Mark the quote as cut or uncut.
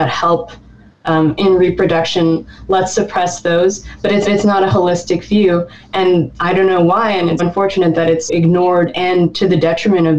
cut